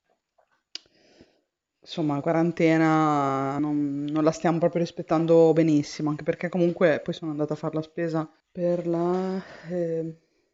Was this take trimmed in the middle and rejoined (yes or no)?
yes